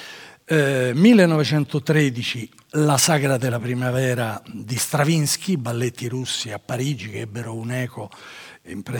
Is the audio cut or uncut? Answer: uncut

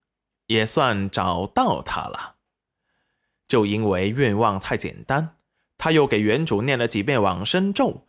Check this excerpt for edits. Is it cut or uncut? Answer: uncut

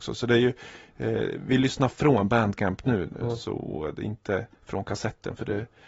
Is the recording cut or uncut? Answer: cut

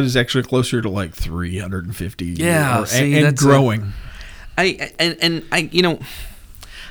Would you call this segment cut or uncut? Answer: uncut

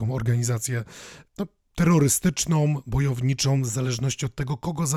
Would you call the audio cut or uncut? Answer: cut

